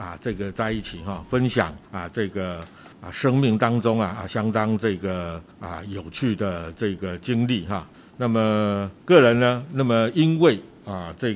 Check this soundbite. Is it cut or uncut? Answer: cut